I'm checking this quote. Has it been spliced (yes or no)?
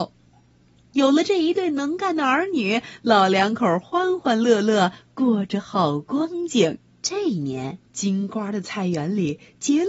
yes